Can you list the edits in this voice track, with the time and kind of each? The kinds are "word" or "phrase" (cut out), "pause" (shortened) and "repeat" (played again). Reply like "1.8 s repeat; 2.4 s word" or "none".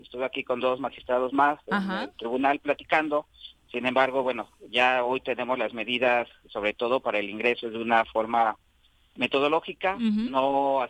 none

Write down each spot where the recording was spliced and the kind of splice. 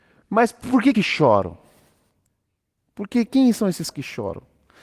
0.9 s phrase; 3.3 s word; 3.9 s word

